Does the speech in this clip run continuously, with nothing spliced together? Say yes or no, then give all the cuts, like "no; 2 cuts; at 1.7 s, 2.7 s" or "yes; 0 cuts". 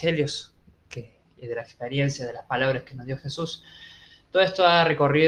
yes; 0 cuts